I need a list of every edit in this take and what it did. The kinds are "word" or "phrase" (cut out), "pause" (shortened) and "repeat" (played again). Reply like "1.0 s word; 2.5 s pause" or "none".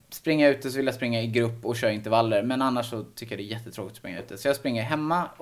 none